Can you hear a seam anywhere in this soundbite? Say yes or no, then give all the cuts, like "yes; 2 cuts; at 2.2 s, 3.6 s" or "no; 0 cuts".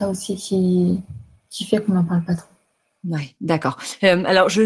no; 0 cuts